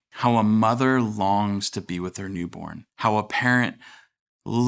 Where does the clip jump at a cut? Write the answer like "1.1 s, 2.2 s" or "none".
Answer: 2.9 s